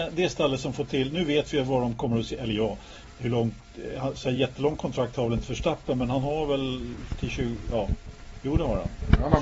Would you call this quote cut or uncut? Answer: uncut